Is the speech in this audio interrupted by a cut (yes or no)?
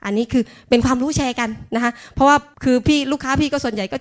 yes